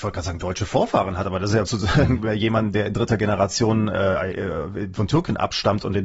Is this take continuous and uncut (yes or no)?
no